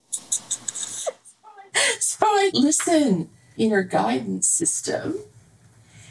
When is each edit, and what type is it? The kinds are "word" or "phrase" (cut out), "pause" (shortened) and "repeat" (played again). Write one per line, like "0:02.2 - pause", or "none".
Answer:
0:02.5 - word
0:03.6 - phrase